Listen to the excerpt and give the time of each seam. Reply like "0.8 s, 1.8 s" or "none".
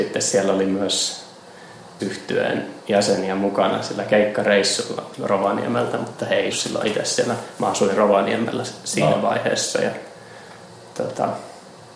2.0 s, 6.5 s